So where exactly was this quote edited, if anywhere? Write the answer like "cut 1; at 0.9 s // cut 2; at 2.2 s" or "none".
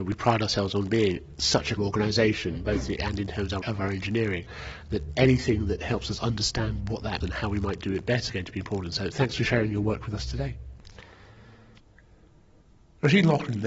cut 1; at 1.8 s // cut 2; at 3.0 s // cut 3; at 3.6 s // cut 4; at 7.2 s // cut 5; at 8.3 s // cut 6; at 9.1 s